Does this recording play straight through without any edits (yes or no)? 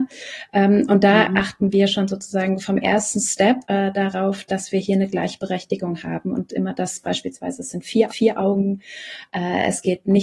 no